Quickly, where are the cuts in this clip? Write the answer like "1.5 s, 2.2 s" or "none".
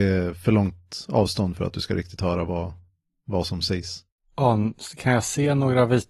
none